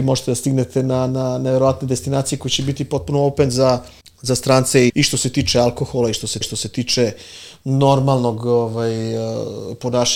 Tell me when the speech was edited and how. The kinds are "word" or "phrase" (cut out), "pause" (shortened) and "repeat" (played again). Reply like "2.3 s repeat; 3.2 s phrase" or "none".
4.0 s pause; 4.9 s word; 6.4 s repeat